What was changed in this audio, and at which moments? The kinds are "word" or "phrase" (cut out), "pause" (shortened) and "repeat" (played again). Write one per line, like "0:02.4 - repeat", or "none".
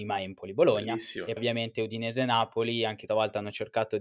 0:01.4 - word
0:03.1 - word